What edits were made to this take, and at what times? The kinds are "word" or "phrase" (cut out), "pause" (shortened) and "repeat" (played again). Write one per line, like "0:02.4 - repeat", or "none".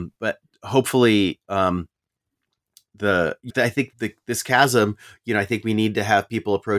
0:03.5 - word
0:03.9 - word